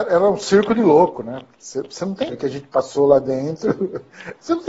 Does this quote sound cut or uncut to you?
cut